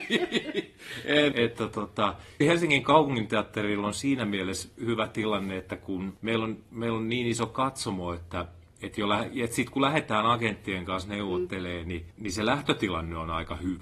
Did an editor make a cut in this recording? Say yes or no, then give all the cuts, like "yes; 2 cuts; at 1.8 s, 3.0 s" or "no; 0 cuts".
yes; 3 cuts; at 1.3 s, 2.4 s, 4.7 s